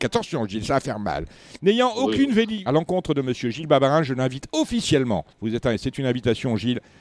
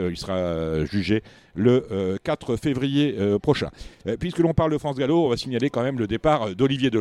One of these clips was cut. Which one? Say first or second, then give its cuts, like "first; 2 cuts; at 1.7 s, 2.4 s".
first; 2 cuts; at 2.7 s, 5.3 s